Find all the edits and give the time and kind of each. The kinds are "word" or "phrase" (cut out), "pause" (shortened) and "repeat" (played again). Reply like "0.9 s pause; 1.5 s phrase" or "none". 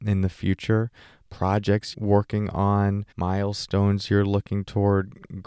1.9 s word; 3.1 s pause